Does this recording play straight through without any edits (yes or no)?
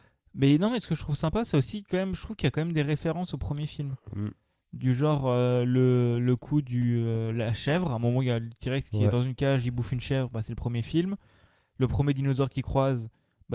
yes